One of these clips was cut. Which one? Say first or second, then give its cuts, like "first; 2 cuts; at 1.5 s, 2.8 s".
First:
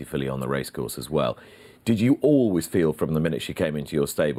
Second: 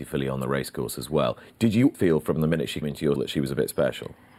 second; 4 cuts; at 1.5 s, 1.9 s, 2.8 s, 3.2 s